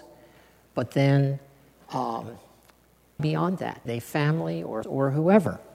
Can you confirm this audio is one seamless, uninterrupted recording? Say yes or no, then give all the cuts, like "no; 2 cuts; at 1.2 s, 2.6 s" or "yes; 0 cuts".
no; 3 cuts; at 3.2 s, 3.9 s, 4.8 s